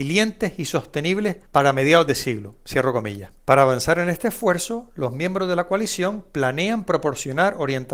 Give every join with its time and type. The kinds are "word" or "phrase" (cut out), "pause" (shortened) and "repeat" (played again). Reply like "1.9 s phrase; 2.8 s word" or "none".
1.5 s pause; 3.4 s pause